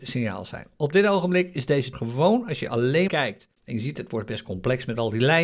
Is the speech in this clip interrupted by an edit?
yes; 3 cuts; at 1.9 s, 3.1 s, 3.6 s

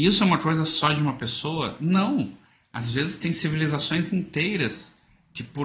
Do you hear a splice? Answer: no; 0 cuts

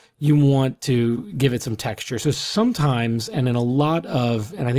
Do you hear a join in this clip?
no; 0 cuts

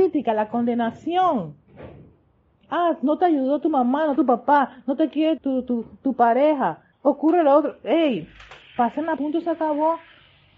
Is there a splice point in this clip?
yes; 4 cuts; at 4.2 s, 5.4 s, 6.9 s, 9.2 s

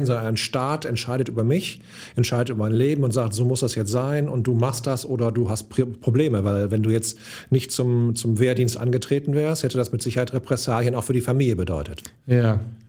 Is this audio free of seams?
yes; 0 cuts

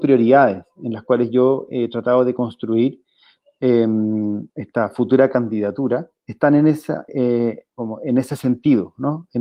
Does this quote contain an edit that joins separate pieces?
yes; 4 cuts; at 4.5 s, 6.2 s, 7.1 s, 7.7 s

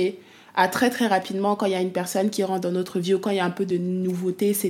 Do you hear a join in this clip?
no; 0 cuts

